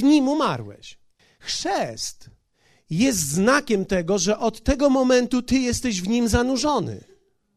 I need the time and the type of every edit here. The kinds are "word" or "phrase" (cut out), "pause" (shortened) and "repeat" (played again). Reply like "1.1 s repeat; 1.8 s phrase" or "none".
1.2 s pause